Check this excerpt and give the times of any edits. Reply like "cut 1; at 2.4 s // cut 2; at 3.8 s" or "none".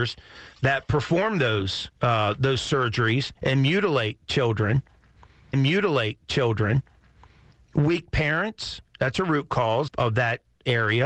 cut 1; at 2.0 s // cut 2; at 3.4 s // cut 3; at 5.5 s // cut 4; at 8.9 s // cut 5; at 9.9 s